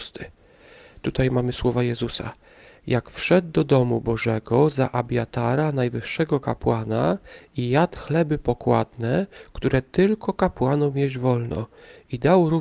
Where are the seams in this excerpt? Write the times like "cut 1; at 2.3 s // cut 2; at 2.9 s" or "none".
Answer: none